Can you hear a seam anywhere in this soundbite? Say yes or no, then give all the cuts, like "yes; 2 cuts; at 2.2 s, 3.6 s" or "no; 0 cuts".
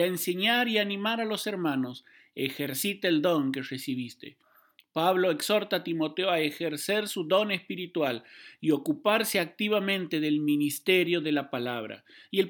no; 0 cuts